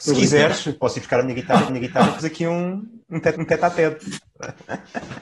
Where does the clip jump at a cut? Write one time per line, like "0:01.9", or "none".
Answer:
0:01.7
0:02.2
0:03.0
0:03.4

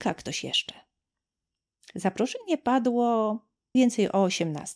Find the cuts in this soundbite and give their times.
0:03.7

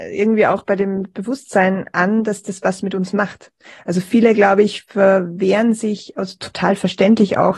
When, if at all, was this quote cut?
none

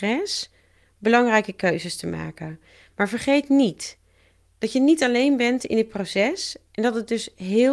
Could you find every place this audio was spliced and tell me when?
none

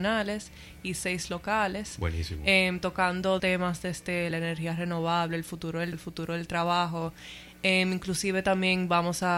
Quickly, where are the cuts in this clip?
0:03.4
0:04.3
0:05.9

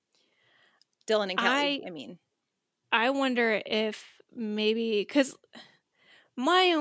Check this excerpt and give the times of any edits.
none

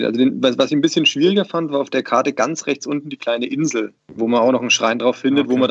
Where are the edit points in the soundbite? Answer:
0:04.0

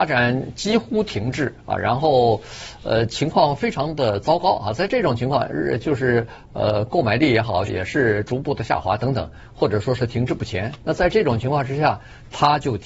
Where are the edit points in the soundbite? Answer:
0:07.7

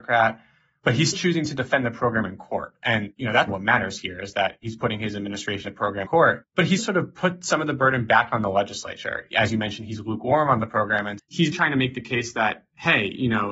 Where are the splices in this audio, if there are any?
0:01.1
0:03.5
0:05.6
0:06.0
0:06.8
0:11.2
0:11.5

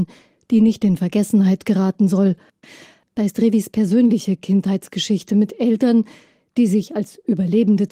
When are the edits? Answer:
none

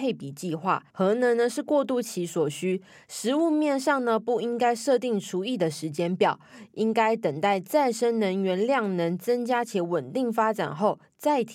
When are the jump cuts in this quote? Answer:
0:00.9

